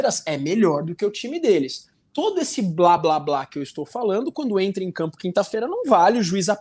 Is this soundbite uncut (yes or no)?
yes